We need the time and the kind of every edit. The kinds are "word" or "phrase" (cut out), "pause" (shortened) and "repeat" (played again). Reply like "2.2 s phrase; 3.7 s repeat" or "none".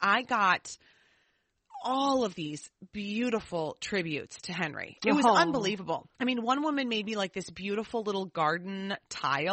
6.1 s pause